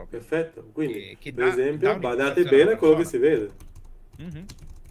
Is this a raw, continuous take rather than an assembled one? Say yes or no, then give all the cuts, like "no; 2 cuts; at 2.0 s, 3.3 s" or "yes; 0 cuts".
yes; 0 cuts